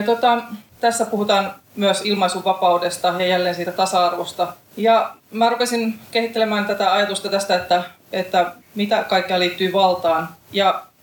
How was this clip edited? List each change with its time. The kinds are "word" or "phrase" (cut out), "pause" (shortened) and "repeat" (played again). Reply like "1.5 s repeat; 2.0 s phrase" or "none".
none